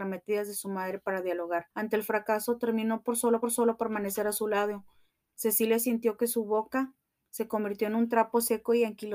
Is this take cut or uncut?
cut